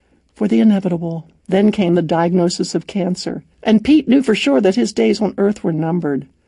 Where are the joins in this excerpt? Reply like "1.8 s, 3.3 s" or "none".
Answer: 1.4 s, 3.5 s